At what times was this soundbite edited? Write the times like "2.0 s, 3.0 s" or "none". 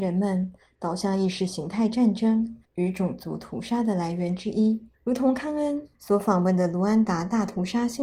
2.6 s, 4.9 s, 5.9 s

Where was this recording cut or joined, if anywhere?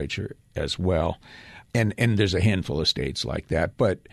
1.7 s

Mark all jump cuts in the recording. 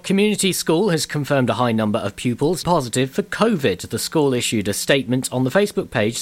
2.6 s

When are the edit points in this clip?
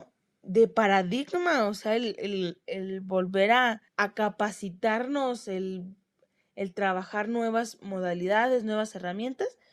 3.9 s

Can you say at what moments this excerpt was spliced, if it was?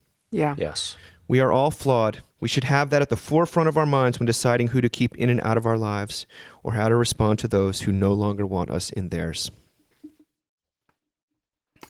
2.3 s

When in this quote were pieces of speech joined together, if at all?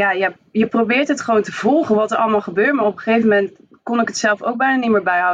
none

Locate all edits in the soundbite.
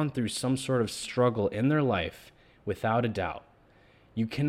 none

